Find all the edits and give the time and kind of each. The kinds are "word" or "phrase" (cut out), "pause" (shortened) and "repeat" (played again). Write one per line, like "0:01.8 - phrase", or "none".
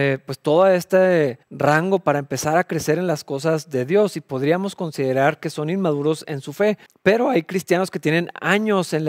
0:01.4 - pause
0:06.9 - pause

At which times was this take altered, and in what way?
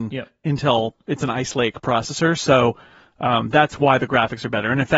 none

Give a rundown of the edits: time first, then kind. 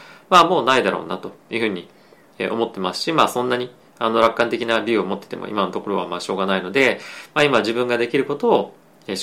none

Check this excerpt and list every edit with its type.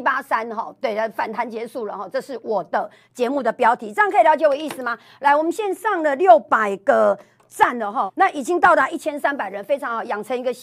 0:08.1 - word

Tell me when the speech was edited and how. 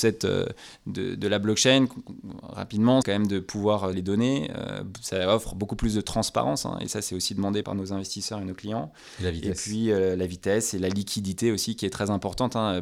0:03.0 - word
0:03.9 - phrase
0:07.6 - word

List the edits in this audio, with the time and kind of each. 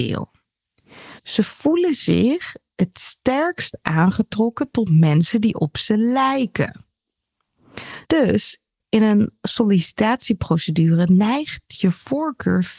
0:01.2 - pause
0:08.0 - pause

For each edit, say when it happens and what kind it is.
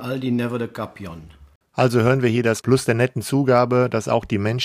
0:02.6 - word

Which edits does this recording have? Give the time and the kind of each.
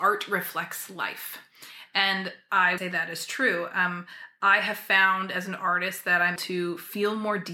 0:02.8 - word
0:06.4 - word

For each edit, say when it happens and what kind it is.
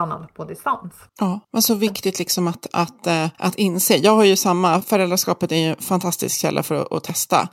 0:01.1 - pause
0:01.4 - pause
0:03.3 - pause

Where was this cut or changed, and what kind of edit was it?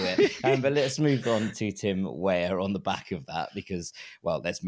none

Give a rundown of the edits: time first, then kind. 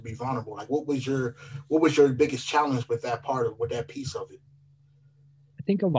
none

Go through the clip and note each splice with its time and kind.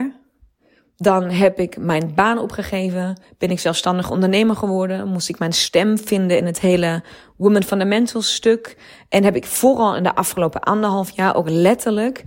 none

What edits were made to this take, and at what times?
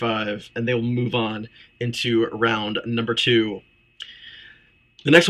none

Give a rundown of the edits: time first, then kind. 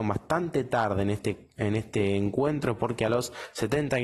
none

